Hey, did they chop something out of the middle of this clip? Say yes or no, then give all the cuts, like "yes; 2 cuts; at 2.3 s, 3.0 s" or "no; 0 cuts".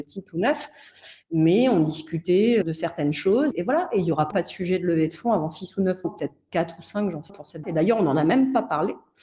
yes; 6 cuts; at 2.6 s, 3.5 s, 4.3 s, 6.0 s, 7.3 s, 7.6 s